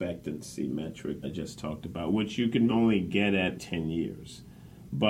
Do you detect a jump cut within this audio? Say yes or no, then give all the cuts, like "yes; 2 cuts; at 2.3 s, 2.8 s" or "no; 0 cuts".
yes; 3 cuts; at 1.2 s, 2.7 s, 3.6 s